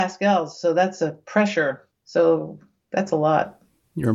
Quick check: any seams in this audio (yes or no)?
yes